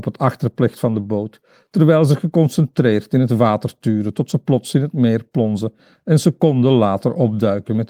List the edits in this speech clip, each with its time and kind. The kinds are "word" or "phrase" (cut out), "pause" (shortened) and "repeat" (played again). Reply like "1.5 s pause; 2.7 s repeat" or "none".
none